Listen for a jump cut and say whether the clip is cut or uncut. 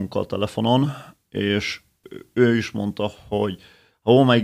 uncut